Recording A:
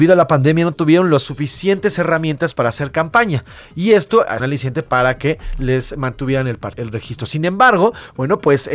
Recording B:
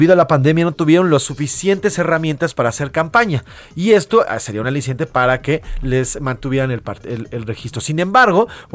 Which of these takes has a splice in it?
A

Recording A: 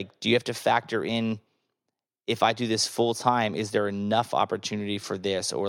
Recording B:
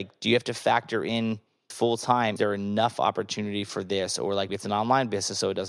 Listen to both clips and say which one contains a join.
B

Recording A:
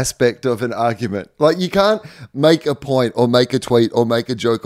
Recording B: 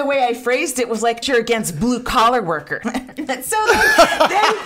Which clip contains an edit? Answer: B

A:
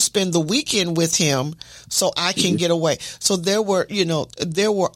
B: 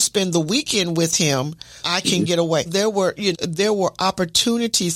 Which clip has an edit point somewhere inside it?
B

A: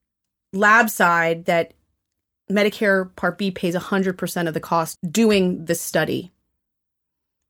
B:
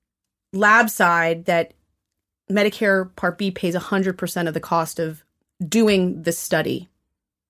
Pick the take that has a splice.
A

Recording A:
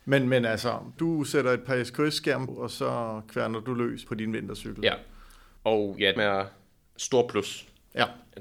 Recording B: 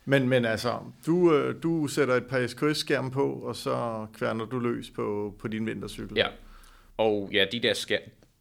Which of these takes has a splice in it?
A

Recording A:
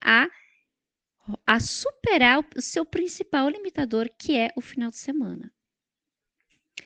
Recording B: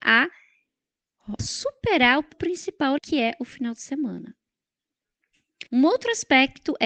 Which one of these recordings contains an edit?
B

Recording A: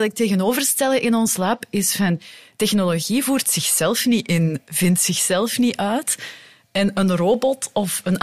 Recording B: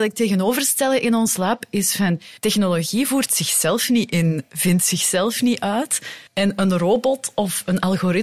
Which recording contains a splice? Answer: B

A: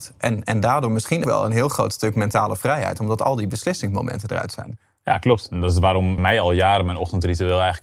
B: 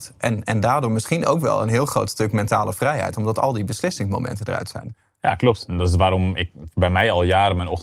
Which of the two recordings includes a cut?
A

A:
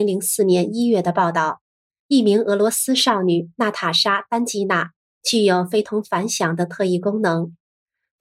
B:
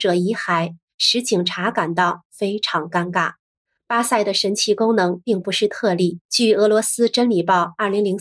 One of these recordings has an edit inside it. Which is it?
B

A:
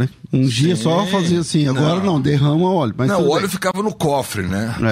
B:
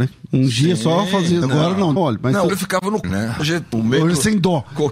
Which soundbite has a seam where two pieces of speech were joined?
B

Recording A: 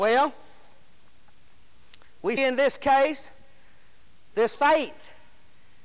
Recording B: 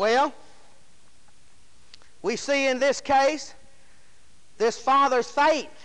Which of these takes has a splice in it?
A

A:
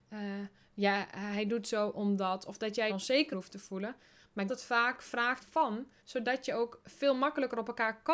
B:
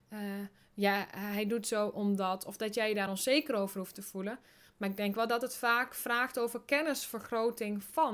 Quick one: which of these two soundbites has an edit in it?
A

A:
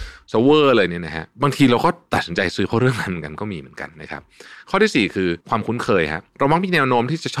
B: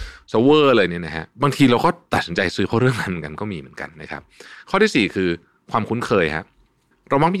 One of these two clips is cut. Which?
A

